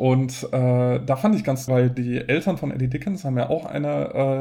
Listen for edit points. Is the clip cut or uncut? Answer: cut